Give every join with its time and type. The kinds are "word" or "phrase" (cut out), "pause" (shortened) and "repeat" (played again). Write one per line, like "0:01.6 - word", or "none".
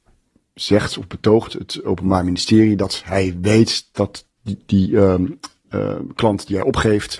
none